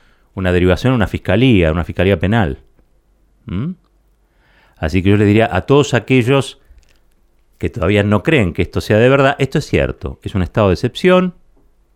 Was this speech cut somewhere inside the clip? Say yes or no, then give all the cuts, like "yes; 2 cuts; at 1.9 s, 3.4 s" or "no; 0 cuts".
no; 0 cuts